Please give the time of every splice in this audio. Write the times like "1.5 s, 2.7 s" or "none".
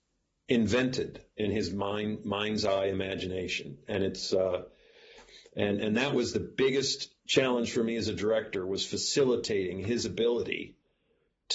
7.2 s